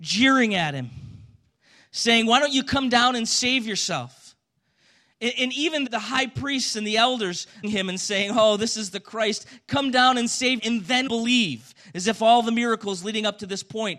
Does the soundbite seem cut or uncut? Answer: cut